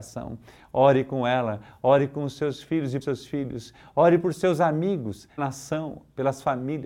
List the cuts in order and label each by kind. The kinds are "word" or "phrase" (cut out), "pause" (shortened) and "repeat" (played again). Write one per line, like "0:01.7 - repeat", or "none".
0:03.0 - word
0:05.4 - word